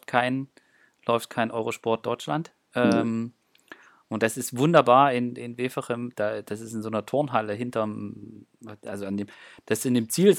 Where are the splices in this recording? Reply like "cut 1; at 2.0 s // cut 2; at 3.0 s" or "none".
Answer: none